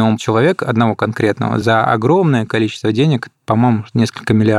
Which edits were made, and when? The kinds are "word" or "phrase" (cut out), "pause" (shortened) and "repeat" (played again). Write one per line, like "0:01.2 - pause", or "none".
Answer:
none